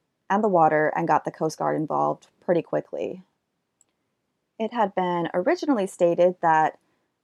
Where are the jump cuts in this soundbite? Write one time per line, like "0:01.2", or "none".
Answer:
none